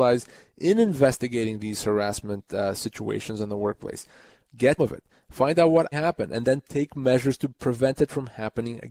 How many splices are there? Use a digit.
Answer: 2